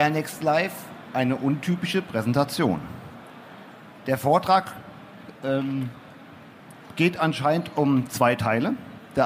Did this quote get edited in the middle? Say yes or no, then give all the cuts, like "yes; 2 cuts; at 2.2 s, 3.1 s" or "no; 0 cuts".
no; 0 cuts